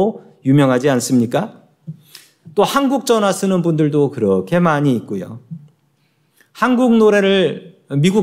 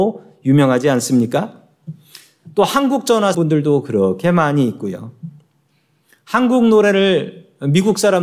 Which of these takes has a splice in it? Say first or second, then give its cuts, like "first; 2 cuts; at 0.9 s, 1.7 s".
second; 1 cut; at 3.3 s